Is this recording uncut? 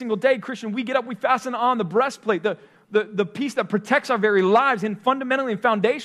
yes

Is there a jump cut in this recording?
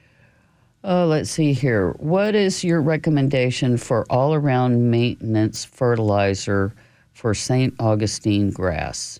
no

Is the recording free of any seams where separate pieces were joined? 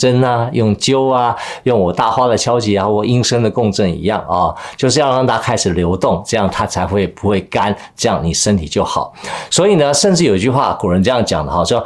yes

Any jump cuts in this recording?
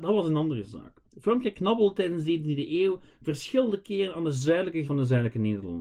yes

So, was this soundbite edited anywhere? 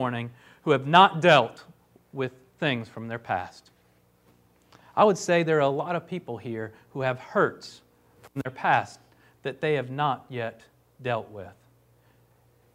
no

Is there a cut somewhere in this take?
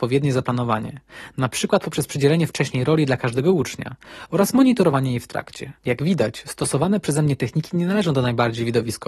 yes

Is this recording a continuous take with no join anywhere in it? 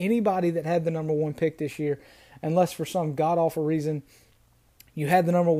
yes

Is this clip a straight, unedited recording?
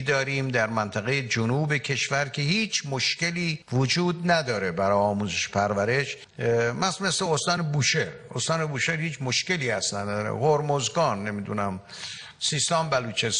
yes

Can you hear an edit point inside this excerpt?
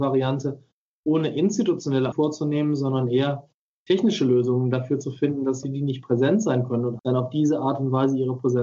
yes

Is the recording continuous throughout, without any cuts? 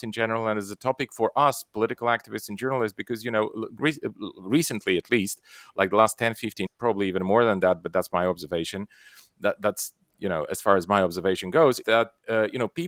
no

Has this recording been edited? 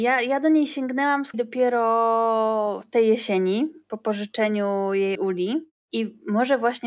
yes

